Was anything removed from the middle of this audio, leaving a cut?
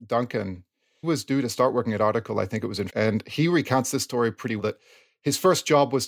yes; 3 cuts; at 1.0 s, 2.9 s, 4.6 s

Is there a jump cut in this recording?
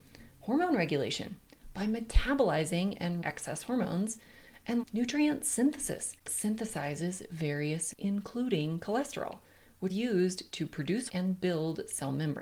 yes; 6 cuts; at 3.2 s, 4.8 s, 6.3 s, 7.9 s, 9.9 s, 11.1 s

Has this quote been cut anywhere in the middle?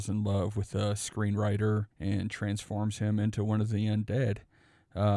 yes; 1 cut; at 1.9 s

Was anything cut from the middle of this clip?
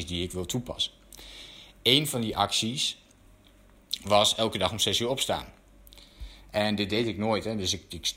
no; 0 cuts

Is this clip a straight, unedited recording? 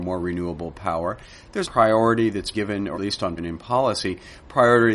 no; 4 cuts; at 1.6 s, 2.5 s, 2.9 s, 3.4 s

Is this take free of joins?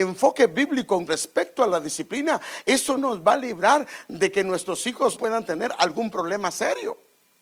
no; 3 cuts; at 1.1 s, 3.0 s, 5.2 s

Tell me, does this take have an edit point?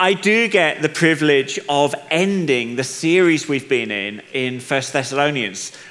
no; 0 cuts

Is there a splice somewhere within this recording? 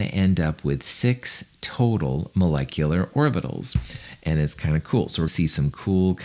yes; 1 cut; at 5.3 s

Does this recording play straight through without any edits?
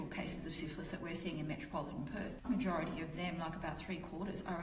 no; 1 cut; at 2.4 s

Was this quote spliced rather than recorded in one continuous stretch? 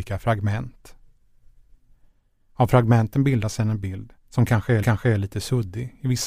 yes; 2 cuts; at 4.2 s, 4.8 s

